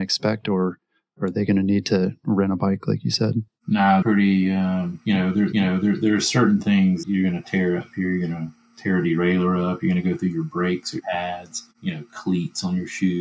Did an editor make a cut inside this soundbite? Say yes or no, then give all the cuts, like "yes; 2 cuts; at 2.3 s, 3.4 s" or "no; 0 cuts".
yes; 5 cuts; at 4.0 s, 5.5 s, 7.0 s, 11.0 s, 11.7 s